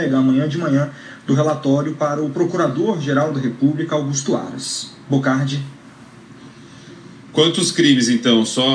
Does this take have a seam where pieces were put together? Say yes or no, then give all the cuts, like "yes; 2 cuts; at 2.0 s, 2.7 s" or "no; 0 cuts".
no; 0 cuts